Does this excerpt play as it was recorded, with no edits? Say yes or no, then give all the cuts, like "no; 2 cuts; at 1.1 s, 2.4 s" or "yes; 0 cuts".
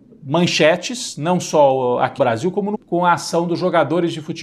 no; 2 cuts; at 2.2 s, 2.7 s